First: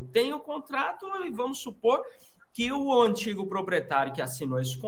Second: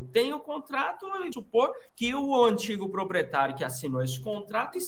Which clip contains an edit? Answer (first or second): second